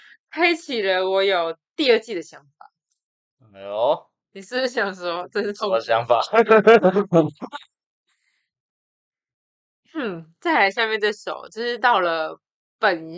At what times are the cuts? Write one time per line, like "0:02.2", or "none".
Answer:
none